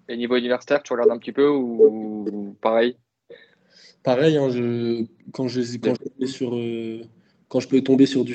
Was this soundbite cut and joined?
yes; 1 cut; at 5.9 s

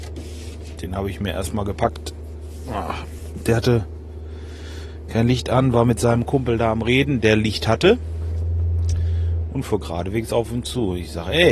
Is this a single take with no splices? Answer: yes; 0 cuts

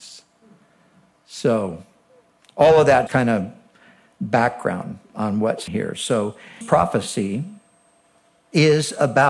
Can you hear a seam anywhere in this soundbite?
yes; 3 cuts; at 3.1 s, 5.7 s, 6.6 s

